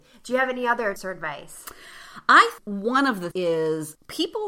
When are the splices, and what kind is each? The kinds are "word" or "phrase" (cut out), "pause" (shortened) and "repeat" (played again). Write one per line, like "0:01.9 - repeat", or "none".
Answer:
0:01.0 - word
0:02.6 - word
0:03.3 - word